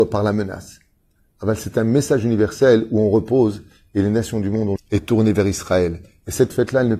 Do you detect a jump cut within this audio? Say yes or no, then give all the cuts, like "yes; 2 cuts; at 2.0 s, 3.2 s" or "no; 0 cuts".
yes; 1 cut; at 4.8 s